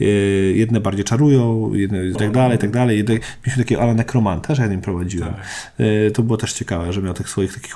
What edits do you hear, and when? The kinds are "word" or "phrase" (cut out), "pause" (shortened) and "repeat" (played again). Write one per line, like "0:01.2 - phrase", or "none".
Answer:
0:02.2 - word
0:04.5 - word